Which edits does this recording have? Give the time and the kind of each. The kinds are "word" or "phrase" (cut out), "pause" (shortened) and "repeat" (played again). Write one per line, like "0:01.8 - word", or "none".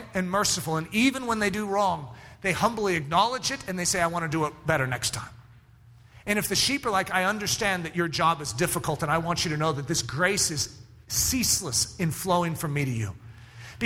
none